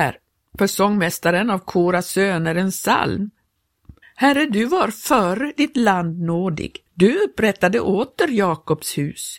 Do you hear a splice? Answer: yes; 2 cuts; at 4.0 s, 6.9 s

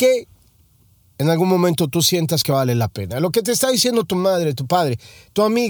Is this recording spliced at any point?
no; 0 cuts

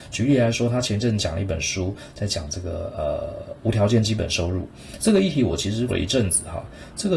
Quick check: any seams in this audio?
yes; 1 cut; at 5.9 s

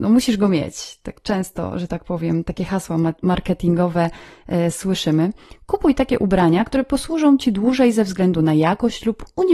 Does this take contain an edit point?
no; 0 cuts

